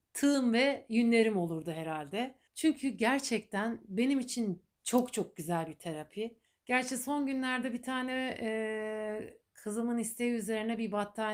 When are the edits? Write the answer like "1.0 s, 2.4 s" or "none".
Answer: 2.5 s, 6.5 s